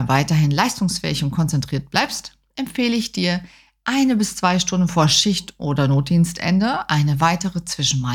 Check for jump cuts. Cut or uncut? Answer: uncut